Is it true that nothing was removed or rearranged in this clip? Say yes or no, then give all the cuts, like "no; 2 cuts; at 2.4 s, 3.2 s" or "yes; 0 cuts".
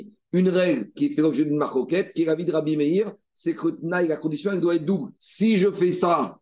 no; 1 cut; at 5.2 s